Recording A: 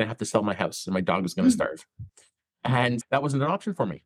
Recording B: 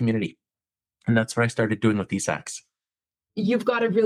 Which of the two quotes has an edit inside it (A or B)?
A